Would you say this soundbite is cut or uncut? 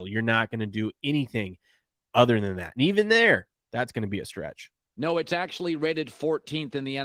uncut